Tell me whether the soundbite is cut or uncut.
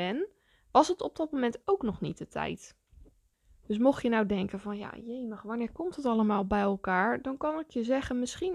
cut